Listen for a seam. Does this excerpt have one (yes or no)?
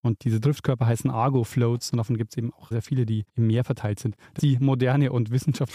yes